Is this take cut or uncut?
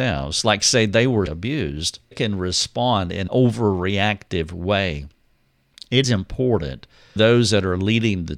cut